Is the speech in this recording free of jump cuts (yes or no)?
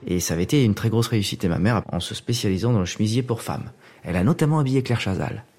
no